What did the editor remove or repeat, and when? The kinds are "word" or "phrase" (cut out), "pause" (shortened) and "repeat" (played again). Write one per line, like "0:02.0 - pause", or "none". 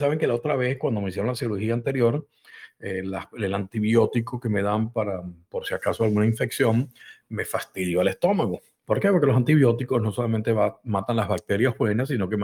none